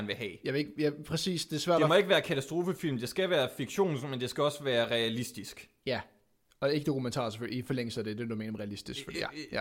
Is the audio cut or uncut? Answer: uncut